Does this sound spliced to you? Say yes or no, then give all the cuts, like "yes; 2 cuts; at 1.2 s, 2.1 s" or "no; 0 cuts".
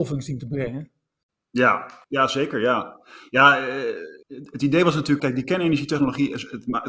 yes; 3 cuts; at 2.0 s, 4.2 s, 5.2 s